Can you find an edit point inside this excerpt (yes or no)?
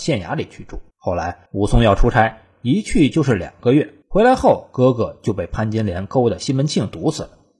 yes